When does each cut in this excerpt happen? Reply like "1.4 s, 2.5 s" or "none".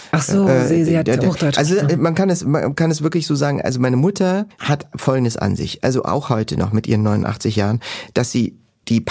none